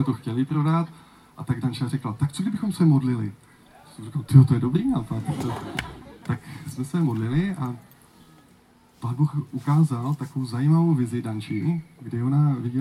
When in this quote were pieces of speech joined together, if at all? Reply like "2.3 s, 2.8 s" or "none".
none